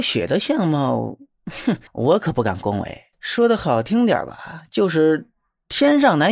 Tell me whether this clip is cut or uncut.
cut